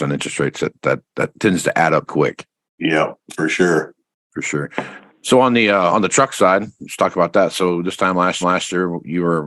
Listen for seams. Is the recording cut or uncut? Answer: cut